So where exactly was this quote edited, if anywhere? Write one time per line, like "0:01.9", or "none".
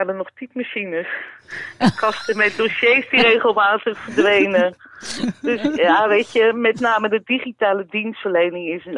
none